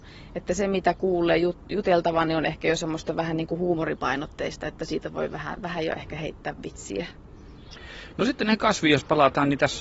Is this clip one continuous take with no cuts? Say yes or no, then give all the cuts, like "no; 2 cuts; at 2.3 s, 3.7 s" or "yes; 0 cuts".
yes; 0 cuts